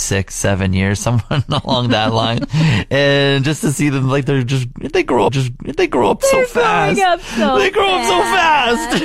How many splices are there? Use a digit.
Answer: 1